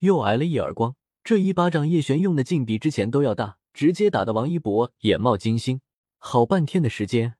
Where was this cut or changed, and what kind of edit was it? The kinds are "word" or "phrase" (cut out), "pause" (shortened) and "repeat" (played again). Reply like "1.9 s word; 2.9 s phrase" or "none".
1.1 s pause; 3.7 s pause; 6.0 s pause